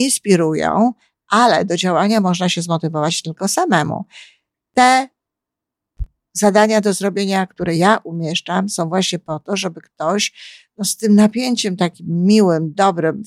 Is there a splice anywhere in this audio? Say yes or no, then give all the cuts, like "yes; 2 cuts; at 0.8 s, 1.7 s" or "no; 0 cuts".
no; 0 cuts